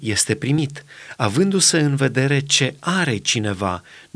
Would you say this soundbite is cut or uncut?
uncut